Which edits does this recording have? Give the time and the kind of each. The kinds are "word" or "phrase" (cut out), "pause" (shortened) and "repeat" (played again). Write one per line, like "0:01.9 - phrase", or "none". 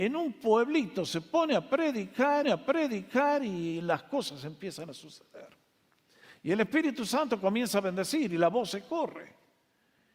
0:02.4 - repeat